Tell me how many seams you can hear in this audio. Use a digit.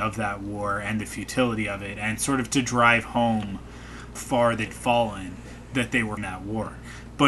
3